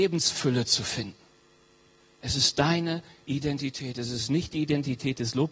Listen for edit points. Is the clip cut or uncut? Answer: uncut